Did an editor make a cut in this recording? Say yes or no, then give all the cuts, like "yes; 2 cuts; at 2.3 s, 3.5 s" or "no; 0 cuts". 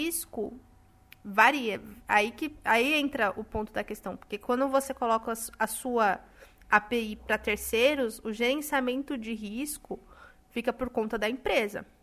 no; 0 cuts